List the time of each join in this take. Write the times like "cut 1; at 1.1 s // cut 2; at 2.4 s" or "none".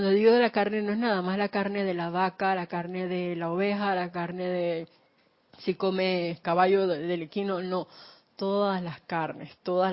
none

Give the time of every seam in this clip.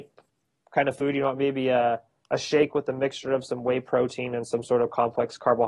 none

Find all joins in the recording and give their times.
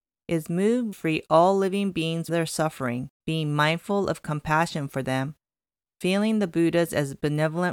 cut 1; at 0.9 s // cut 2; at 2.3 s // cut 3; at 3.2 s

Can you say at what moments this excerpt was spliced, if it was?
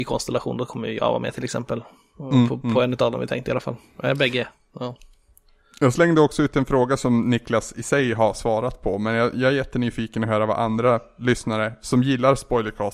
none

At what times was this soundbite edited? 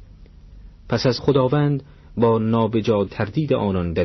cut 1; at 1.2 s // cut 2; at 3.1 s

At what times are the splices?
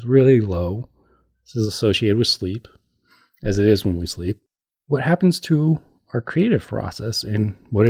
none

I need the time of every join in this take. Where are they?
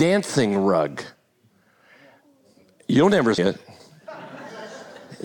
cut 1; at 3.4 s

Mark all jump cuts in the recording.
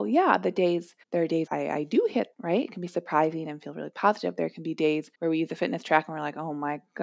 cut 1; at 1.0 s // cut 2; at 1.5 s // cut 3; at 2.3 s // cut 4; at 5.1 s

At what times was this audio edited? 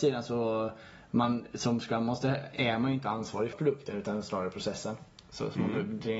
cut 1; at 3.5 s

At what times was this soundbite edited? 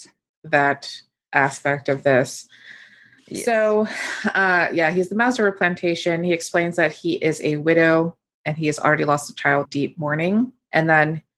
cut 1; at 9.6 s

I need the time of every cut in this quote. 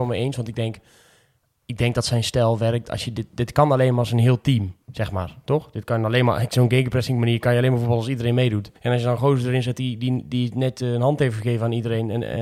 cut 1; at 4.8 s // cut 2; at 8.8 s

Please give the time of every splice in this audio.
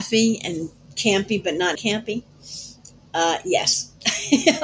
cut 1; at 1.7 s

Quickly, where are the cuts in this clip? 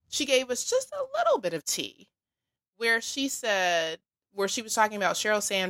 none

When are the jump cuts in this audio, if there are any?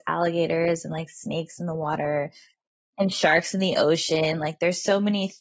none

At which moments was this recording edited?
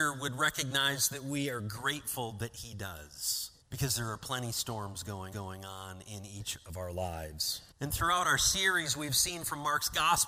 cut 1; at 3.6 s // cut 2; at 5.3 s // cut 3; at 7.7 s

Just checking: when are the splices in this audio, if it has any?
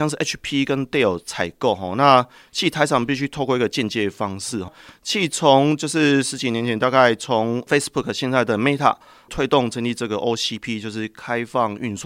none

